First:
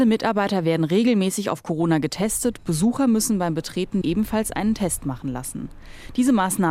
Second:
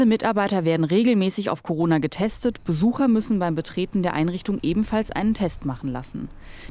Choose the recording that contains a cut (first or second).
first